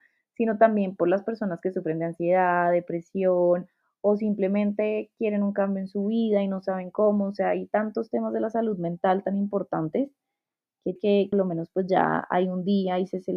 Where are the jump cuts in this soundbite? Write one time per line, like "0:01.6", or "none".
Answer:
0:11.0
0:11.3